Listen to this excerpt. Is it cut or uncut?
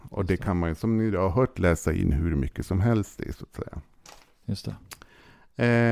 uncut